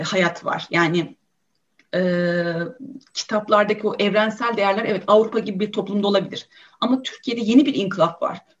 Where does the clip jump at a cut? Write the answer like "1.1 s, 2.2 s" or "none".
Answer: none